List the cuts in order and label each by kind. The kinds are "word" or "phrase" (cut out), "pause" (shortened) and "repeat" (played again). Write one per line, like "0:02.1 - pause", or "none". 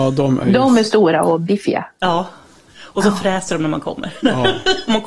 none

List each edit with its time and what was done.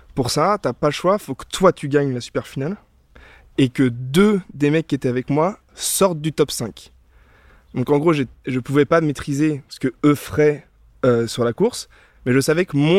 none

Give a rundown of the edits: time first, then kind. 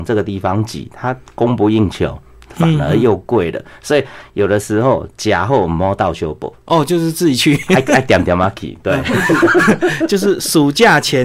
none

